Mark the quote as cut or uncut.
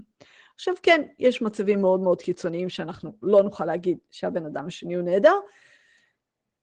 uncut